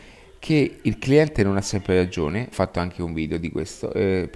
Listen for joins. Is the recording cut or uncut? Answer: cut